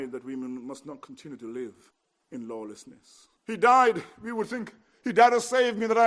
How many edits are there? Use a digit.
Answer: 2